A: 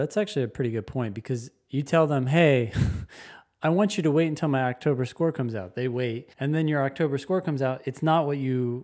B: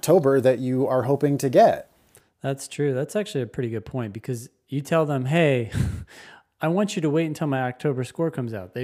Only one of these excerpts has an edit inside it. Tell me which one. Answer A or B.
A